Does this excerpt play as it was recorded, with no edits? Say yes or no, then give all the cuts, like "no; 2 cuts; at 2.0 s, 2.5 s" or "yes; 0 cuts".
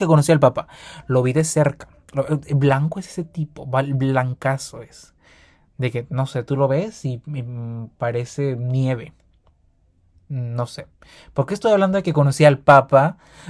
yes; 0 cuts